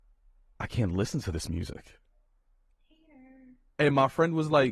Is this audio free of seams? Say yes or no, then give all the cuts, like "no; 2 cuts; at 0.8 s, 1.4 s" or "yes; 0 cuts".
yes; 0 cuts